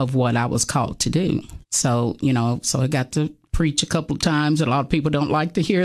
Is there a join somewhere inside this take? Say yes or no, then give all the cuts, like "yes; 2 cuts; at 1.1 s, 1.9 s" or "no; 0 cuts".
yes; 1 cut; at 1.6 s